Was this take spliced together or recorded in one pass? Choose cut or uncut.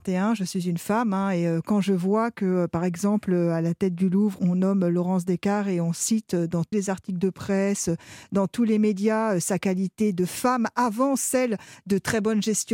cut